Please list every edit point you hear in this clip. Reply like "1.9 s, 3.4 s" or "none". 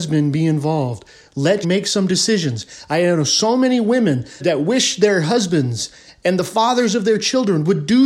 1.6 s, 4.4 s